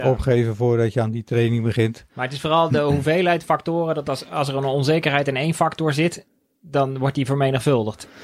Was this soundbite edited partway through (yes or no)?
no